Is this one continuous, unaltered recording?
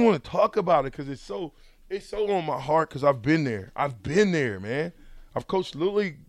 yes; 0 cuts

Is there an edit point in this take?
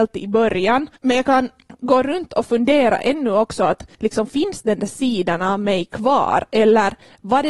yes; 2 cuts; at 1.0 s, 3.9 s

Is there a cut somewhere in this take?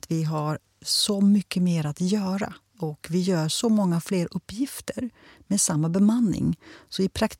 no; 0 cuts

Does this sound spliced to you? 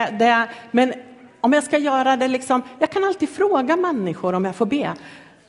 no; 0 cuts

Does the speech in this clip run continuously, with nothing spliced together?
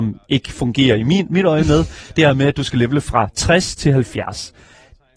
yes; 0 cuts

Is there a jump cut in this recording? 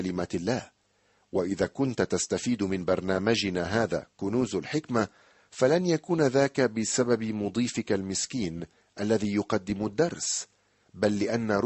no; 0 cuts

